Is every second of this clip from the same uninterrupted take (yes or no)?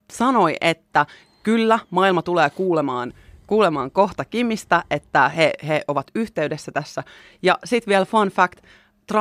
yes